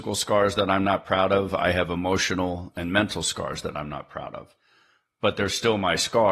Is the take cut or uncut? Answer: uncut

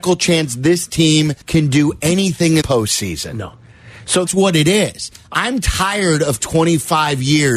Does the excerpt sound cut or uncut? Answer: cut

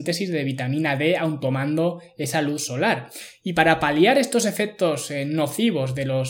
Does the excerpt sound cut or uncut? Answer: uncut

